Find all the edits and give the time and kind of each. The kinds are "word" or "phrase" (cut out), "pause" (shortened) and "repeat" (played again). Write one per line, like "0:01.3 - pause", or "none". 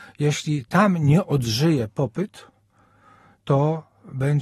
none